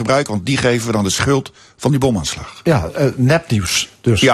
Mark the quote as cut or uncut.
uncut